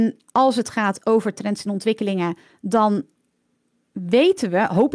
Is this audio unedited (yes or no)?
yes